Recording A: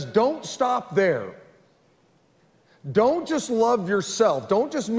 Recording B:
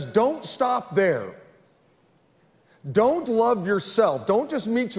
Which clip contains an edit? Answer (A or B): B